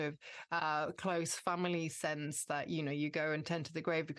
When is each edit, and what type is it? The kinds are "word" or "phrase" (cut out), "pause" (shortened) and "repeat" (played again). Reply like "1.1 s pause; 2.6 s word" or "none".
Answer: none

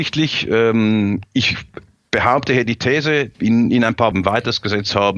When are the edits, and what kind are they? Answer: 1.2 s word; 3.3 s word; 4.1 s phrase

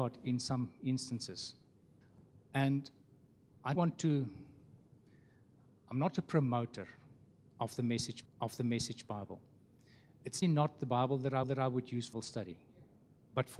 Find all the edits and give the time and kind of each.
3.7 s word; 8.3 s repeat; 10.4 s word; 11.4 s repeat; 12.1 s word

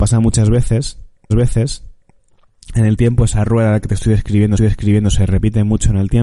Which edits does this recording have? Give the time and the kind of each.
1.3 s repeat; 4.6 s repeat

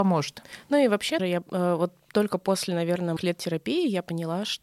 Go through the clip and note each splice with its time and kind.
1.2 s word; 3.2 s word

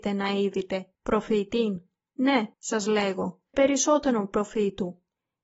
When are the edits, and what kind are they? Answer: 0.9 s pause; 2.5 s pause; 3.5 s word

